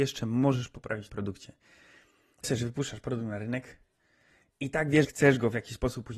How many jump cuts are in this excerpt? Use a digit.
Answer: 3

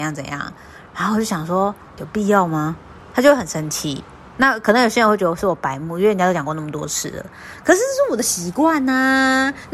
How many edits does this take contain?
1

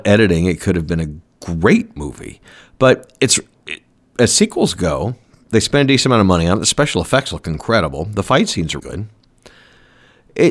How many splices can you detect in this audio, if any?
1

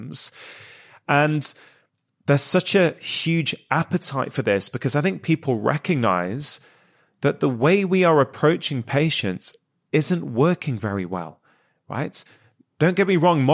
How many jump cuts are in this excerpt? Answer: 0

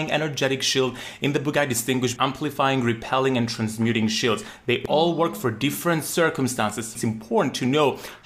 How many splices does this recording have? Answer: 2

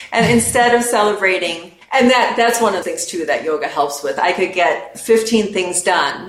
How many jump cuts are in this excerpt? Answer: 2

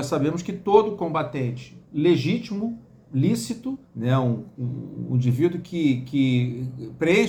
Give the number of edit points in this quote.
2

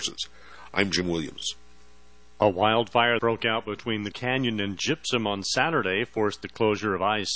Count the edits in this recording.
2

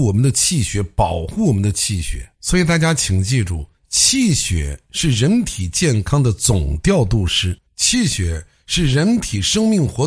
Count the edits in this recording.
2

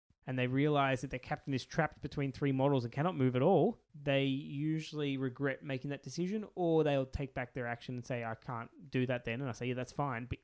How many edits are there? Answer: 1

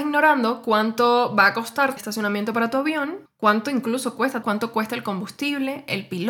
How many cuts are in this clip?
3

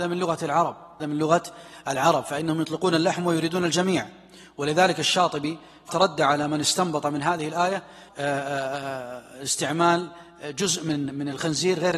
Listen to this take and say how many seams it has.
3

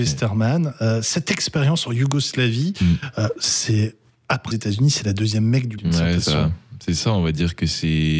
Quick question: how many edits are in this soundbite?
3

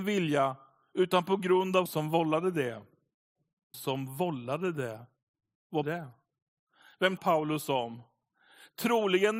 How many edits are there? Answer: 4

